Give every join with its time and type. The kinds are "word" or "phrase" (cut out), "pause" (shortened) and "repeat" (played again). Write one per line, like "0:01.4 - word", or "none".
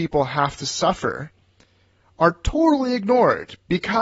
none